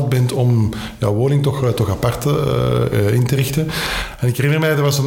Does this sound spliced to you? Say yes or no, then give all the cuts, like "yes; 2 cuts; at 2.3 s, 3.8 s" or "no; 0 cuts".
no; 0 cuts